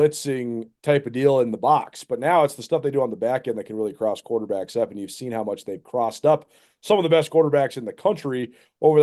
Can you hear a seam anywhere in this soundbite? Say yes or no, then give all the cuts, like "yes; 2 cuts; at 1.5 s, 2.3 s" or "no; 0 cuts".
no; 0 cuts